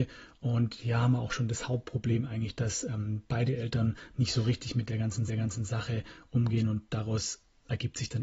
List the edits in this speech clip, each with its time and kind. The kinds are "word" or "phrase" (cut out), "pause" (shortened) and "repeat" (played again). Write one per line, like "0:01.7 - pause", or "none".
0:05.3 - repeat